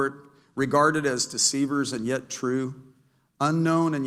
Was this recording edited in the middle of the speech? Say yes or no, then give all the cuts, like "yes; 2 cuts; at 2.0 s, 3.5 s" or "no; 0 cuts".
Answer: no; 0 cuts